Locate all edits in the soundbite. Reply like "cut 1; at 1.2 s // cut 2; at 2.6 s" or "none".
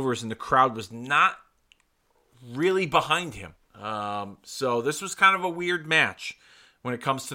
cut 1; at 3.6 s

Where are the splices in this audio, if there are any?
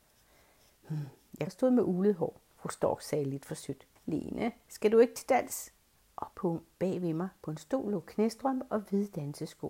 cut 1; at 1.5 s // cut 2; at 2.5 s // cut 3; at 4.0 s // cut 4; at 6.3 s

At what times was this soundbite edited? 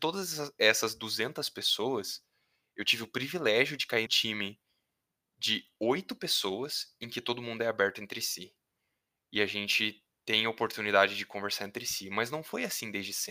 cut 1; at 4.1 s

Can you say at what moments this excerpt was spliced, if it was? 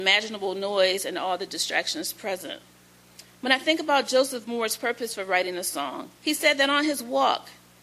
cut 1; at 6.1 s

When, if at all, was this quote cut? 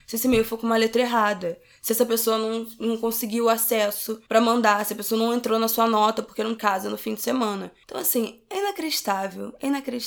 cut 1; at 4.2 s // cut 2; at 6.6 s

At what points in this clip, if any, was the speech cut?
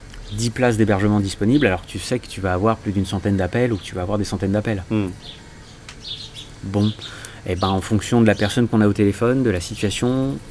none

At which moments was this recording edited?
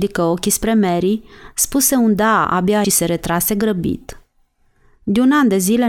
cut 1; at 2.8 s

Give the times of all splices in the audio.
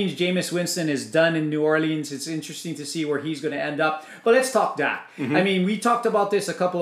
none

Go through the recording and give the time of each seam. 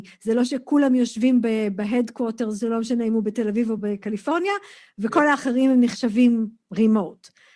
none

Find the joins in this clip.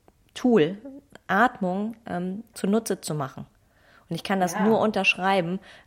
cut 1; at 2.5 s

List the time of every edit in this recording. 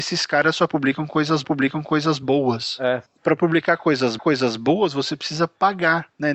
cut 1; at 1.4 s // cut 2; at 3.1 s // cut 3; at 4.2 s

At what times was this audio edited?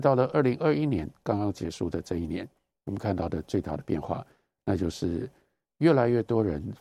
none

